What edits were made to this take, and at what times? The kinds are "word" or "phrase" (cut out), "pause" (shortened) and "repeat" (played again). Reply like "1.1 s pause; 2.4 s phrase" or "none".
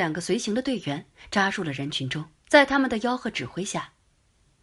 2.4 s pause